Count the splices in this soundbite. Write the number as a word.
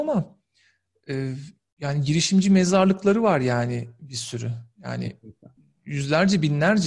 zero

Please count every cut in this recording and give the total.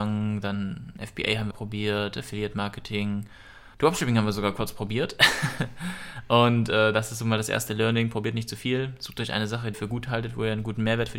three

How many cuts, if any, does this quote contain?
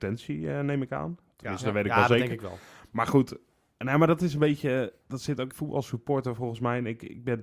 one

